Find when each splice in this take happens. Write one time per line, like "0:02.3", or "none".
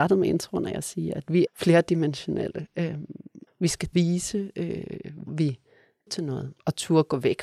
0:01.5
0:03.5
0:03.9
0:05.3
0:06.1